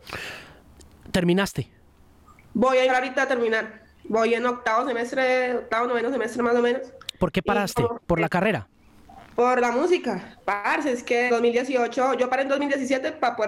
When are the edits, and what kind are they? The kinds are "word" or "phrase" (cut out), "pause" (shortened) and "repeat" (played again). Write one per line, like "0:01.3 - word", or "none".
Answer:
0:02.9 - word
0:11.3 - word